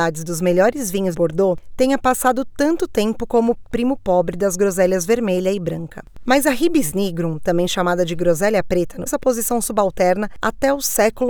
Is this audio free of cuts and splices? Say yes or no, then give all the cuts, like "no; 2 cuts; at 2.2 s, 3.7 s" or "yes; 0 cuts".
no; 2 cuts; at 1.1 s, 9.1 s